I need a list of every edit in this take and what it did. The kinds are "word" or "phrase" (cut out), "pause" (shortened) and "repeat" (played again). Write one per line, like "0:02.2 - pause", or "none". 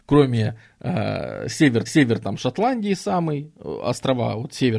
0:01.9 - repeat